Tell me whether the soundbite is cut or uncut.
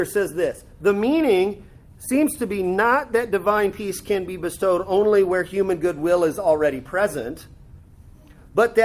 uncut